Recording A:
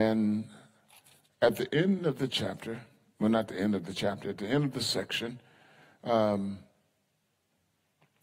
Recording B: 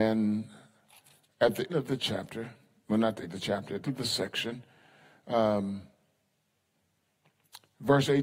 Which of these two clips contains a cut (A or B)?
B